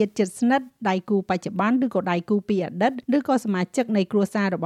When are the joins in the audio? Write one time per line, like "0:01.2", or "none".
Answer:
0:03.0